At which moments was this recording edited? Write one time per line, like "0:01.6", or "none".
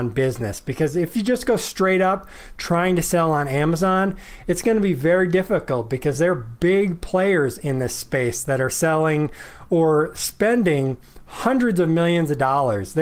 none